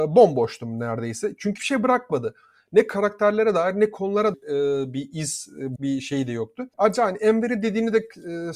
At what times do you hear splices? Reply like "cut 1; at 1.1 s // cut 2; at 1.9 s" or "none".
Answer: cut 1; at 1.6 s // cut 2; at 4.3 s // cut 3; at 5.8 s // cut 4; at 6.7 s